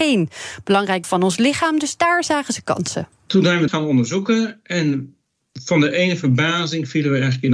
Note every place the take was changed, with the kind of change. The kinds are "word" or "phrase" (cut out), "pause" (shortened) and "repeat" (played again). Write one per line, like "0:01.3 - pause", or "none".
0:01.0 - word
0:03.7 - word